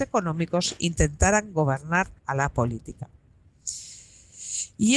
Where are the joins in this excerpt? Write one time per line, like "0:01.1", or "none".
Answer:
0:02.2